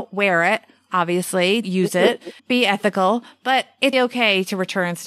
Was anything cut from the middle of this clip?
yes; 3 cuts; at 1.6 s, 2.4 s, 3.9 s

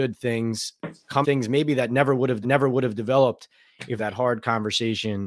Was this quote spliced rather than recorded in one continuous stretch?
yes; 3 cuts; at 1.2 s, 2.4 s, 4.0 s

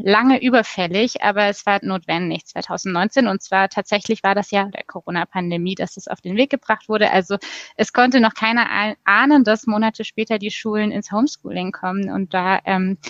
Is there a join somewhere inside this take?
yes; 2 cuts; at 1.8 s, 4.7 s

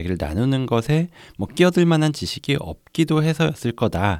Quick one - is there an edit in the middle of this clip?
no; 0 cuts

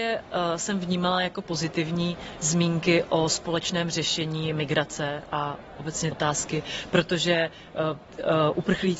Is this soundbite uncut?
no; 1 cut; at 6.1 s

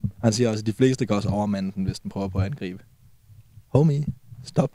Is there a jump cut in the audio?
no; 0 cuts

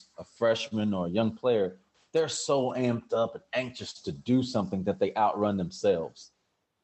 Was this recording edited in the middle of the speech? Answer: no; 0 cuts

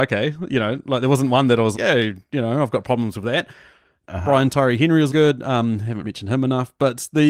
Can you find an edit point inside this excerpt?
yes; 3 cuts; at 1.7 s, 5.1 s, 6.0 s

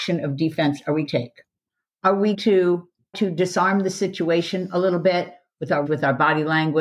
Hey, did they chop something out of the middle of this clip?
yes; 4 cuts; at 1.1 s, 2.3 s, 3.1 s, 5.9 s

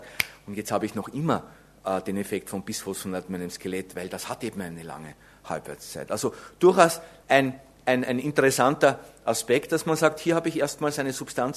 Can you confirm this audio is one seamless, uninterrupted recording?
yes; 0 cuts

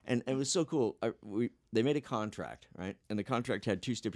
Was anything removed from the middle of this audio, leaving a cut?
yes; 1 cut; at 3.0 s

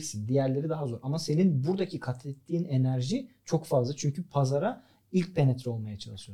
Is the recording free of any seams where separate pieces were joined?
yes; 0 cuts

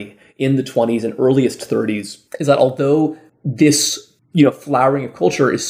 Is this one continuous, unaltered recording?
no; 1 cut; at 2.3 s

